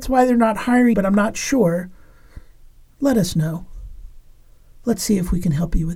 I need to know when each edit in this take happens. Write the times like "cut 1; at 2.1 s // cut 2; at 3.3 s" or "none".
cut 1; at 0.9 s